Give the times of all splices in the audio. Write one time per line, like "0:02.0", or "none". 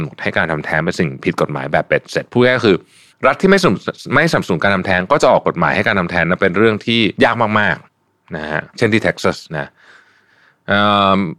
0:03.1
0:07.2
0:07.8
0:08.7
0:09.5